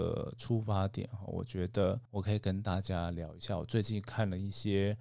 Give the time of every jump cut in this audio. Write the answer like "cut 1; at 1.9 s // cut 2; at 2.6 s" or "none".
cut 1; at 2.1 s